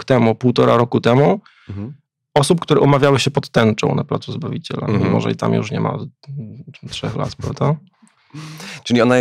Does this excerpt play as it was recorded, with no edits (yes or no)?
yes